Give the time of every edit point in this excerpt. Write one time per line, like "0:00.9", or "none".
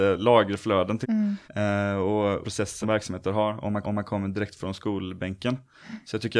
0:01.0
0:01.4
0:02.4
0:02.8
0:03.8